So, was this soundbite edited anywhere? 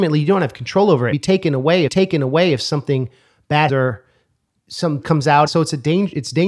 yes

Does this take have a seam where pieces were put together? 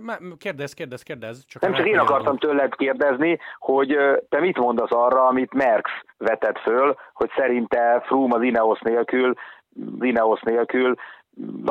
yes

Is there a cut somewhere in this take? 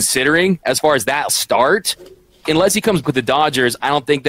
yes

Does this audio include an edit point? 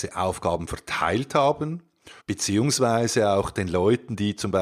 yes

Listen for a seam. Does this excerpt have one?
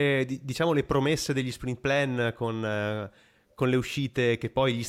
no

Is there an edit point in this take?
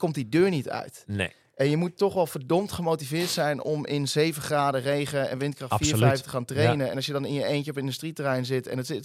no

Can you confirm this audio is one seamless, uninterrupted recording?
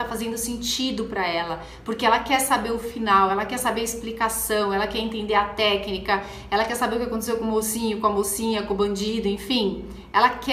yes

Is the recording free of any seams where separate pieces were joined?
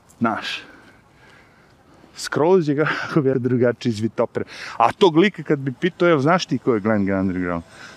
no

